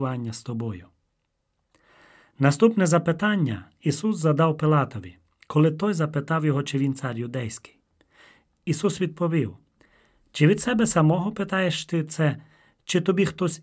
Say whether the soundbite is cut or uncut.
uncut